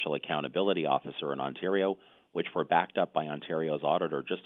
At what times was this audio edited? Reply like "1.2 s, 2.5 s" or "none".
none